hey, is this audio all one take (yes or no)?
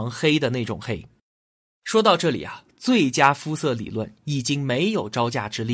yes